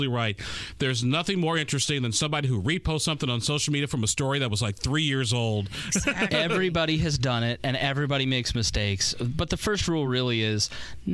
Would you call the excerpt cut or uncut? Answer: uncut